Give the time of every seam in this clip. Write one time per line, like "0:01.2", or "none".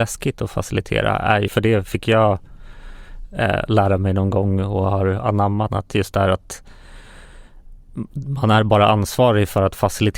0:01.5
0:05.7